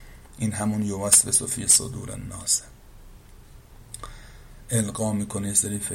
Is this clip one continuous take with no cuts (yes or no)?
yes